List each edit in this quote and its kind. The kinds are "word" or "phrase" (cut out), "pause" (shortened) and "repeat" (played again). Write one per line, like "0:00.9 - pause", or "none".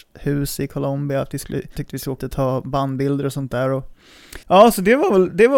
0:01.8 - word
0:02.2 - word
0:04.4 - pause